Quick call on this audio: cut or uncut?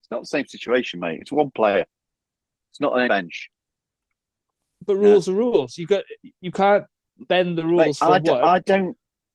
cut